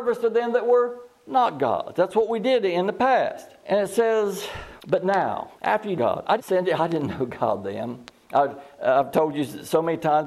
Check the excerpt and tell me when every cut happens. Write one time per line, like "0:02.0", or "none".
0:03.6
0:04.8
0:05.6
0:06.0
0:06.4